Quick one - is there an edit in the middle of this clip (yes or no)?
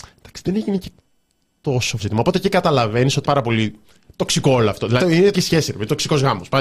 yes